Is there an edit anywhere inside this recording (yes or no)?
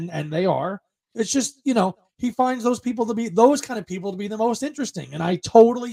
no